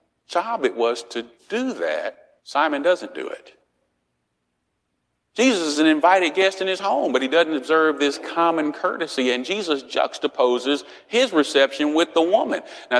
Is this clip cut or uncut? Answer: cut